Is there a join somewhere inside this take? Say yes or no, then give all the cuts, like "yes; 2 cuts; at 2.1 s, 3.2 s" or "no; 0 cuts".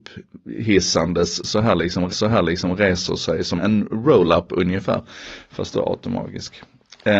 yes; 2 cuts; at 2.1 s, 3.6 s